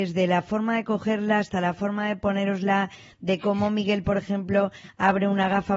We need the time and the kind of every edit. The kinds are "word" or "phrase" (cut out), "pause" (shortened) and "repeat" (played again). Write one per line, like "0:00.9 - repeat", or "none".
none